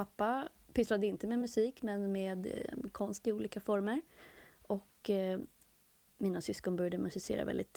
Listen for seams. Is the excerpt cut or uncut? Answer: uncut